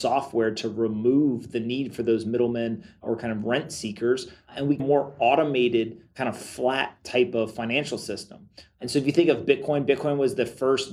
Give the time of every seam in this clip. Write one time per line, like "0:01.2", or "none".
0:04.8